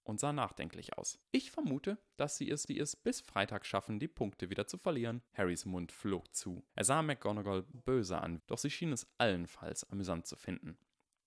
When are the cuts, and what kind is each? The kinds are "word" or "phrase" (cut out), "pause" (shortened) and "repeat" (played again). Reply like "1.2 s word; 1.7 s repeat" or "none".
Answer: 1.2 s pause; 2.7 s repeat; 5.3 s pause; 6.7 s pause; 7.7 s word; 8.4 s phrase